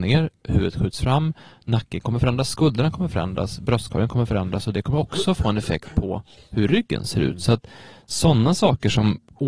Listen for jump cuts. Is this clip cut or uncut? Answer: uncut